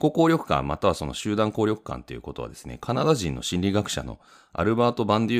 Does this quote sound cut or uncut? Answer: uncut